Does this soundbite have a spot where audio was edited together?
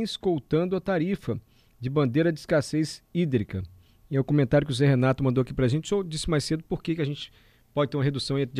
no; 0 cuts

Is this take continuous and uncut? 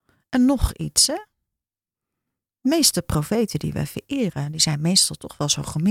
yes; 0 cuts

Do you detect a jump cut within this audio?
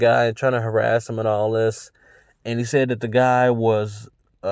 no; 0 cuts

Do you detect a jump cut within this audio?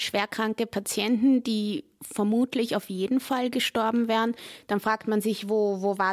no; 0 cuts

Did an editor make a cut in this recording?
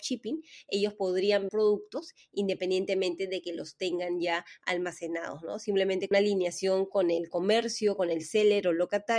yes; 2 cuts; at 1.5 s, 6.1 s

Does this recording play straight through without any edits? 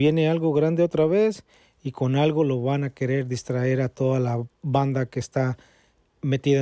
yes; 0 cuts

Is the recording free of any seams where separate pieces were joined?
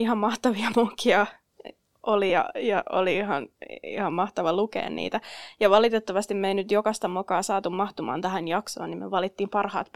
yes; 0 cuts

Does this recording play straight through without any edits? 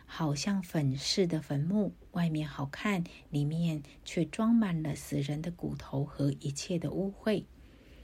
no; 1 cut; at 2.1 s

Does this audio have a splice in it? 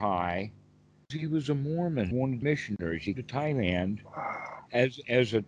yes; 4 cuts; at 1.1 s, 2.1 s, 2.4 s, 3.2 s

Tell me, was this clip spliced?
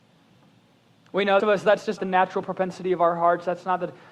yes; 2 cuts; at 1.4 s, 2.0 s

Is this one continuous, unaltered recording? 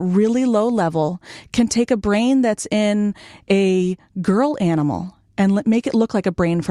yes; 0 cuts

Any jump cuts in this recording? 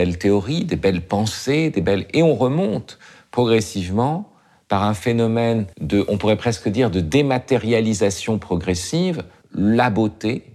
yes; 2 cuts; at 5.7 s, 9.4 s

